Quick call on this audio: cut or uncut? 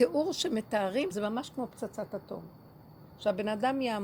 cut